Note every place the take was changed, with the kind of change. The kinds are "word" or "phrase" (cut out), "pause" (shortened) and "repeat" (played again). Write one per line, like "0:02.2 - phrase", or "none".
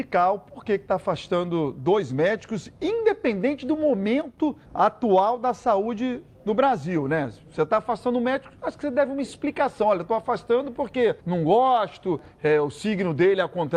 0:04.6 - pause
0:11.2 - pause